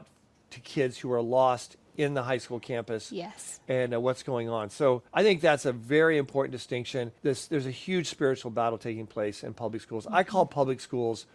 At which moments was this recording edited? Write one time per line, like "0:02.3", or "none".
0:05.1
0:07.2